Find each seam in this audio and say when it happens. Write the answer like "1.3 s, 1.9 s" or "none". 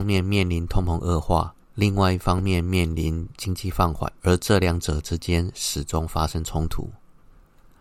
1.6 s, 4.2 s